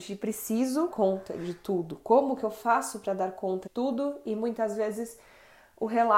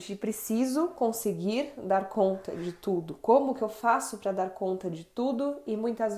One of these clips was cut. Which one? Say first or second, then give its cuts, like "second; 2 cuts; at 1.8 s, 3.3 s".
first; 2 cuts; at 0.9 s, 3.7 s